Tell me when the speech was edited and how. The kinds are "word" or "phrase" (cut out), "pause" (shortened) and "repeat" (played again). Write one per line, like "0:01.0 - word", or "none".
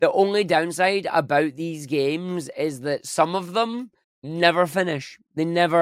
0:04.0 - pause